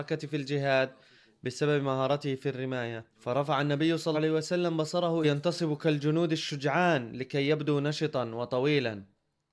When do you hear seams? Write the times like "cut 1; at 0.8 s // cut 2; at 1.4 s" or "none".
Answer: cut 1; at 3.1 s // cut 2; at 4.1 s // cut 3; at 5.2 s